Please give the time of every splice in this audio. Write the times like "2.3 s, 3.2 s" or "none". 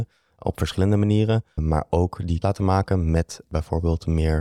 1.6 s, 2.4 s